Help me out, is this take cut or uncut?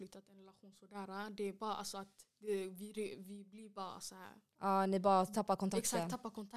uncut